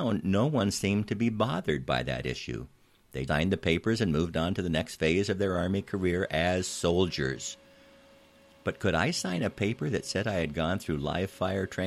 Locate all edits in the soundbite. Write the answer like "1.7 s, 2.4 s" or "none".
3.3 s

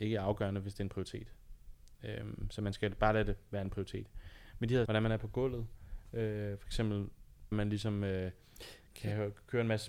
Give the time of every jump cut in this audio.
4.9 s, 7.5 s

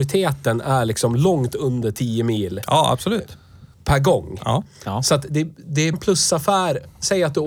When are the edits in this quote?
3.7 s, 5.3 s, 5.9 s

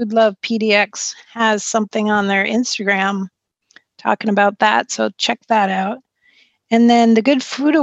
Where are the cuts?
none

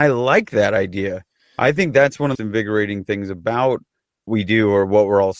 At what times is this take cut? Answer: 2.3 s, 4.3 s

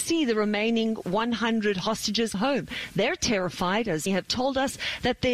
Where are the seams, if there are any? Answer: 2.3 s, 4.1 s

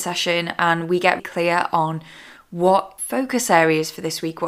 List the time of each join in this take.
1.2 s, 3.0 s

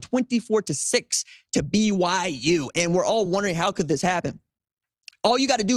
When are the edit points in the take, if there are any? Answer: none

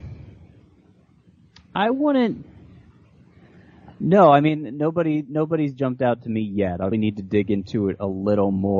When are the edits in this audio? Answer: 6.9 s

